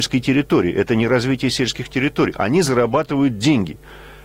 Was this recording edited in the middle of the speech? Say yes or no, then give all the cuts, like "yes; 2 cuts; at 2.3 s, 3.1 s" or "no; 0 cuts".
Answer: no; 0 cuts